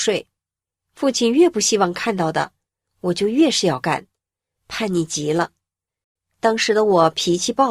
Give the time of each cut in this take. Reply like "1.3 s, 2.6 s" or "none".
none